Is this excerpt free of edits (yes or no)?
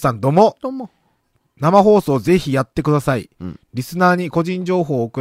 yes